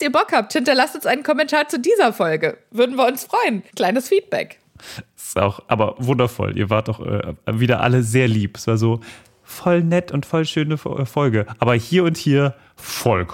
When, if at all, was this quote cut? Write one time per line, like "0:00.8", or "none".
0:03.7